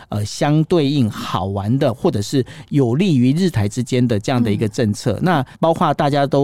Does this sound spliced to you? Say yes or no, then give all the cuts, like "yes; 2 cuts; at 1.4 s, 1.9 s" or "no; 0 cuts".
yes; 1 cut; at 5.5 s